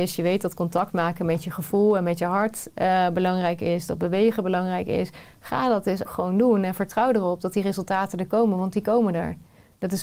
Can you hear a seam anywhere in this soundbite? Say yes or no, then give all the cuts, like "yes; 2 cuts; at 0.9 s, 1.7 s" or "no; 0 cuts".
yes; 1 cut; at 6.0 s